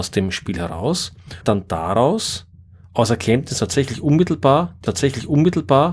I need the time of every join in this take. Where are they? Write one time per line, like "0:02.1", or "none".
0:01.4
0:04.9

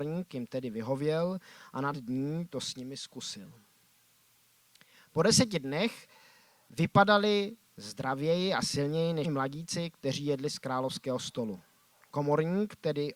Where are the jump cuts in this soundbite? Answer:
0:01.9
0:09.2

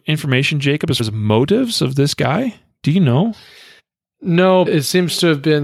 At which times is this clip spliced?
0:01.0
0:04.7

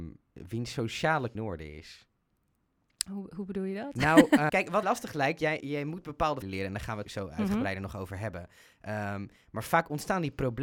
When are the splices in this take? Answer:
0:01.3
0:04.5
0:04.8
0:05.6
0:06.4
0:07.0

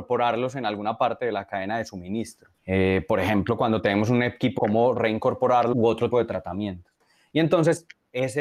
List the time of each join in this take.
0:02.6
0:04.6
0:05.7
0:06.1

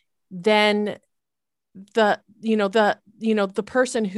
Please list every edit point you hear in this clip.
0:02.7

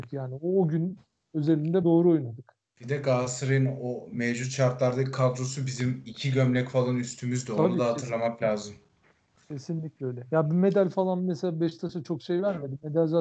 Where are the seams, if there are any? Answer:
0:01.8

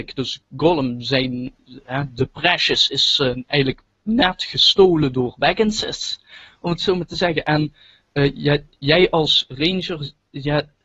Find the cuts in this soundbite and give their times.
none

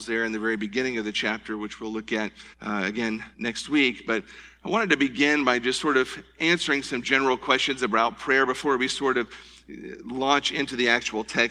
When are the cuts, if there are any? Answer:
0:02.5
0:03.3

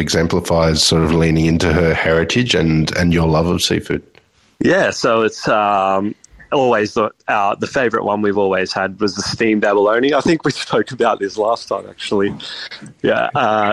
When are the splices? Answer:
none

